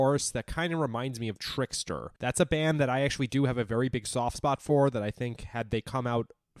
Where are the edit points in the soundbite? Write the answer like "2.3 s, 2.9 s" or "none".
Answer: 2.2 s